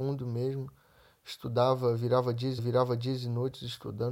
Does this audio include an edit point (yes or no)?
yes